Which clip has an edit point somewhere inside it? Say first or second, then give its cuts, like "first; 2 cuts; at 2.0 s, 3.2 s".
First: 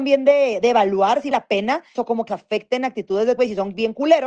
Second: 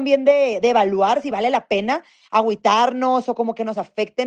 first; 4 cuts; at 1.3 s, 2.0 s, 2.3 s, 3.4 s